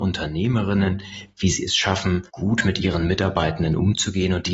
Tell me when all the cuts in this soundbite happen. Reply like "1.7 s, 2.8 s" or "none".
2.3 s